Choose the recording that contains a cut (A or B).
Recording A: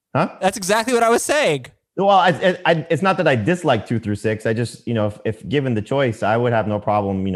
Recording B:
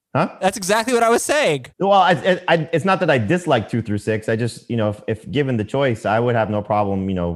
B